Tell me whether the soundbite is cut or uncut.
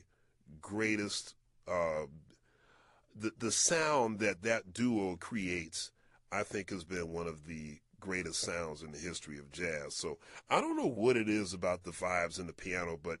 uncut